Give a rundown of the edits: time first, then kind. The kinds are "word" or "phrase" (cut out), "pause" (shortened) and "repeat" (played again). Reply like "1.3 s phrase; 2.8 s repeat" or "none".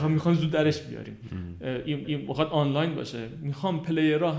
2.0 s repeat